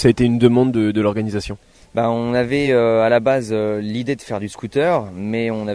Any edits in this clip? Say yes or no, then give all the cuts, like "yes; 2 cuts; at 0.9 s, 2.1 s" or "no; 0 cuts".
no; 0 cuts